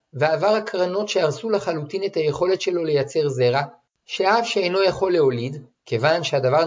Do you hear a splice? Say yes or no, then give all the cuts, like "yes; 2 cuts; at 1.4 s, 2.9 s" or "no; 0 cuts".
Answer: no; 0 cuts